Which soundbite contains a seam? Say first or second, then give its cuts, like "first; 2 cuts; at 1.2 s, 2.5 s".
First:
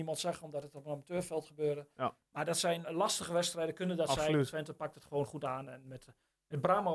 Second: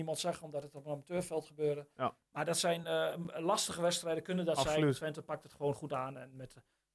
first; 1 cut; at 2.8 s